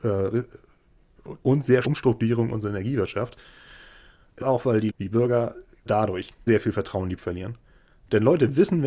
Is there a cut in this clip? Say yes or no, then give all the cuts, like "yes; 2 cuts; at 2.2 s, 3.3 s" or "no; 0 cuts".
yes; 7 cuts; at 1.4 s, 1.8 s, 4.4 s, 4.9 s, 5.9 s, 6.5 s, 7.2 s